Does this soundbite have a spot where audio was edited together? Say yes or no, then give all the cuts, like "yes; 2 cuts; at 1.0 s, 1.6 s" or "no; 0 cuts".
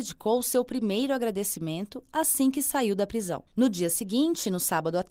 yes; 1 cut; at 3.5 s